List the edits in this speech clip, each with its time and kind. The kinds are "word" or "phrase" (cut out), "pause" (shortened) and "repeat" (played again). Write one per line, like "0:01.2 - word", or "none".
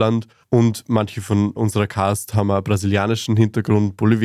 none